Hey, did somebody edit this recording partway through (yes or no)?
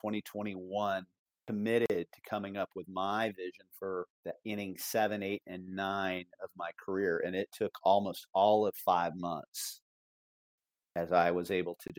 yes